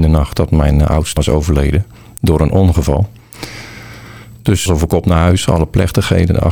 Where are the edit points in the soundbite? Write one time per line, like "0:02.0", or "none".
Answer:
0:01.2
0:04.7